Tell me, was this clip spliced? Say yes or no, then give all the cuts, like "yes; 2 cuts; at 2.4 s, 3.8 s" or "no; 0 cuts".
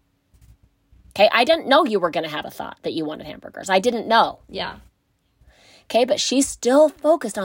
no; 0 cuts